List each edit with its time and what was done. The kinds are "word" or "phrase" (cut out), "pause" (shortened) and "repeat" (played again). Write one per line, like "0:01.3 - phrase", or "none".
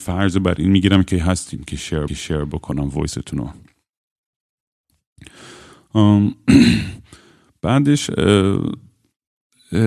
0:01.1 - word
0:02.1 - repeat